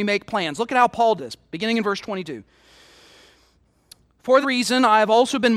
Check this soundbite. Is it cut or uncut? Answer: cut